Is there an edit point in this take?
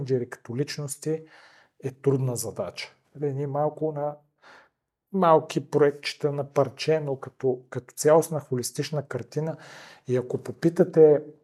no; 0 cuts

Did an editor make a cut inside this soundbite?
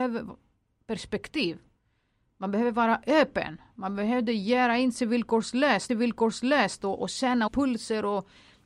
yes; 2 cuts; at 5.9 s, 7.5 s

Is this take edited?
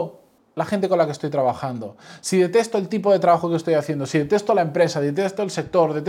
no; 0 cuts

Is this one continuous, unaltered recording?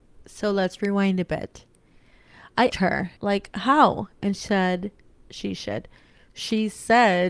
no; 3 cuts; at 2.7 s, 3.2 s, 4.3 s

